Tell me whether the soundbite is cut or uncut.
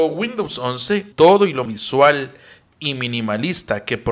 cut